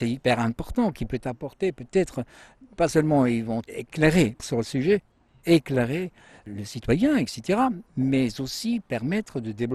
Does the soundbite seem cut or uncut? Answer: uncut